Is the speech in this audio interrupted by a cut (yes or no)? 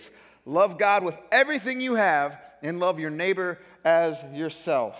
no